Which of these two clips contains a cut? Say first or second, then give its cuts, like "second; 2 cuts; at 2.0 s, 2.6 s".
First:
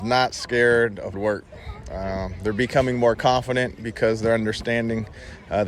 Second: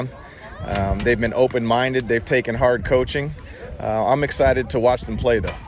first; 1 cut; at 1.1 s